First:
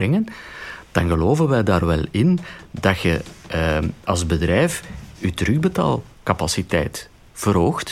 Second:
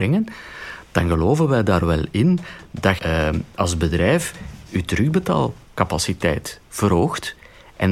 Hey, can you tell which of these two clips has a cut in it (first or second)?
second